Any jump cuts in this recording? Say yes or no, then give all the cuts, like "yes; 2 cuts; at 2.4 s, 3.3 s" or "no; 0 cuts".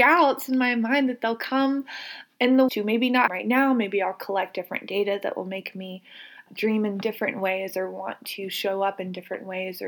yes; 3 cuts; at 2.7 s, 3.3 s, 6.5 s